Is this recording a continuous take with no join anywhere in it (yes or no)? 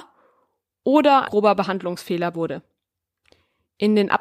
no